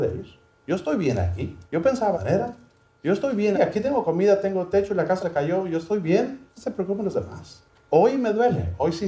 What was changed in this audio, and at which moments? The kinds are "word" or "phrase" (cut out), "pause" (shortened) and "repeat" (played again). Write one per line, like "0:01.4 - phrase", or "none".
0:01.7 - pause
0:02.1 - phrase
0:03.5 - word
0:05.2 - word
0:06.5 - pause
0:07.7 - pause